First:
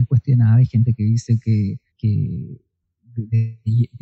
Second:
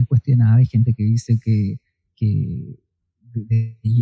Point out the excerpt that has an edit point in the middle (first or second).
first